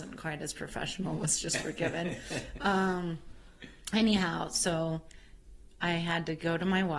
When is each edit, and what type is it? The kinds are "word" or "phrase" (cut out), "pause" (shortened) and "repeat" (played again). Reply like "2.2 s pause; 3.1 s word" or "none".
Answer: none